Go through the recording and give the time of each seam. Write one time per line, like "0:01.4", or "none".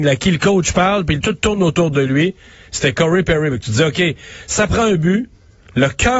none